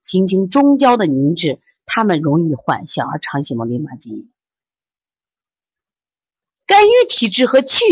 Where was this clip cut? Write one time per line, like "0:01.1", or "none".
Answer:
none

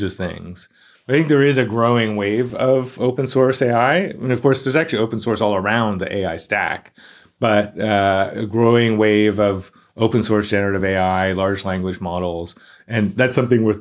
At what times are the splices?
none

